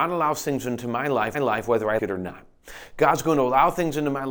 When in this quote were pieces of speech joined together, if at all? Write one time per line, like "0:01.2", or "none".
0:01.3
0:02.0